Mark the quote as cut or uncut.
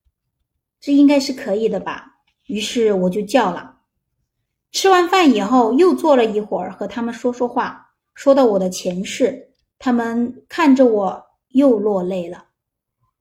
uncut